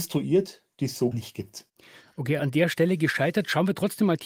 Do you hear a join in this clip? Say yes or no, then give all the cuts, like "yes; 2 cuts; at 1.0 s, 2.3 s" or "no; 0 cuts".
yes; 2 cuts; at 1.1 s, 2.4 s